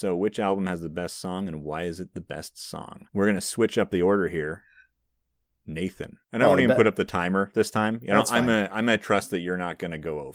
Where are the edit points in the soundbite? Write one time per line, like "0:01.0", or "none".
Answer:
0:03.1
0:06.2